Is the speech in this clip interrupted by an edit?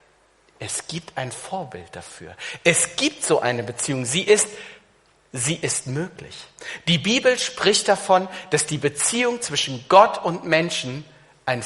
no; 0 cuts

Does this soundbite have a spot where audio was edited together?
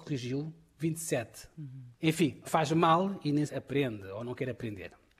yes; 3 cuts; at 2.0 s, 2.4 s, 3.5 s

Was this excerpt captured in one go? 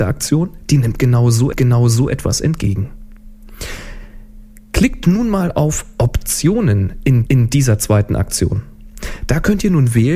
no; 2 cuts; at 1.5 s, 7.3 s

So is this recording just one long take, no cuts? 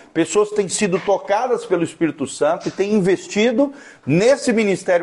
yes; 0 cuts

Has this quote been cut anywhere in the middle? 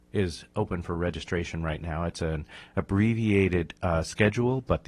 no; 0 cuts

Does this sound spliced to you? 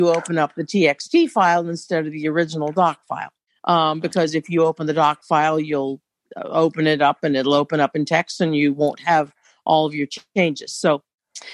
no; 0 cuts

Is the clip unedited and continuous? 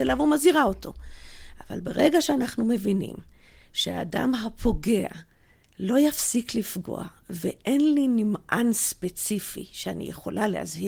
yes; 0 cuts

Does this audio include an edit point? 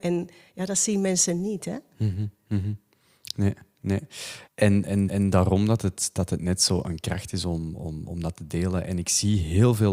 yes; 3 cuts; at 4.5 s, 5.1 s, 8.0 s

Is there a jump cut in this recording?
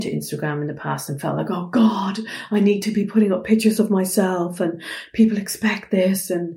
no; 0 cuts

